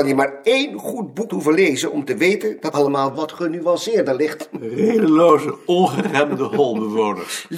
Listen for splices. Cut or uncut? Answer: cut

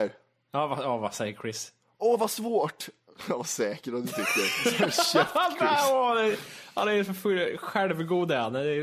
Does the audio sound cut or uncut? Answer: uncut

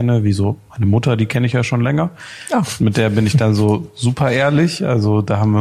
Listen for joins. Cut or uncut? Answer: uncut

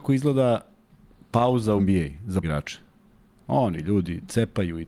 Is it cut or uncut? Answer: cut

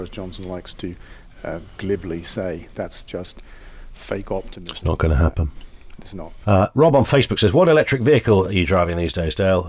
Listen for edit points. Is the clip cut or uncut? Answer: uncut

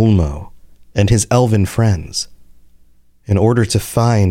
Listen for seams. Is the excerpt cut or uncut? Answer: uncut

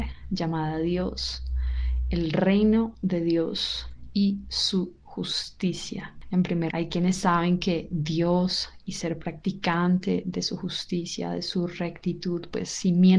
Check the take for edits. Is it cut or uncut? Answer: cut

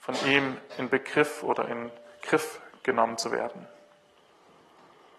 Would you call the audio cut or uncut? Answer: uncut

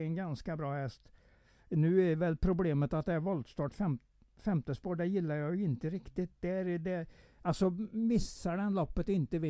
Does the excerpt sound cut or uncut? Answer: uncut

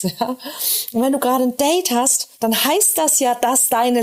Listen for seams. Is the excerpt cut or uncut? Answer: cut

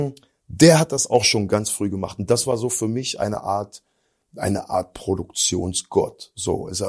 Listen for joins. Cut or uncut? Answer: uncut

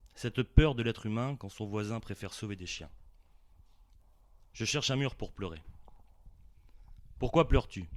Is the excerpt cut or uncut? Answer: uncut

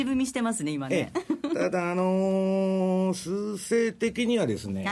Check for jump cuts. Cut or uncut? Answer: uncut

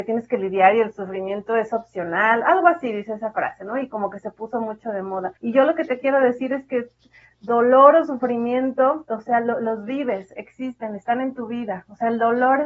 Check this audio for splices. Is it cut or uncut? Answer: cut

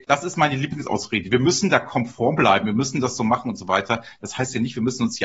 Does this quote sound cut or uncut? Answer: uncut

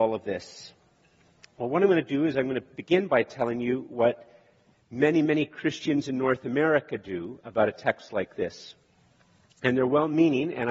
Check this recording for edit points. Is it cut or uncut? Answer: uncut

